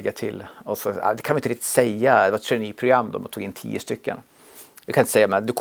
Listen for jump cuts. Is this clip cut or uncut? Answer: uncut